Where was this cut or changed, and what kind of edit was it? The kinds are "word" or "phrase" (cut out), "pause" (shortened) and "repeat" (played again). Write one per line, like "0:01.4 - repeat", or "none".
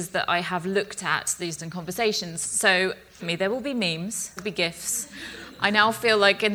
0:01.6 - word
0:03.2 - word
0:04.4 - word